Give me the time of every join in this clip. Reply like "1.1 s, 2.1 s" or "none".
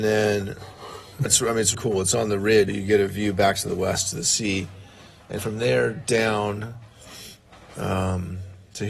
1.3 s, 1.7 s, 2.7 s, 5.4 s